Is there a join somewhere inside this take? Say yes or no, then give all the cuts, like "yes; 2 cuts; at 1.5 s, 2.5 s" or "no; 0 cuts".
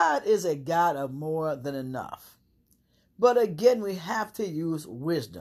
no; 0 cuts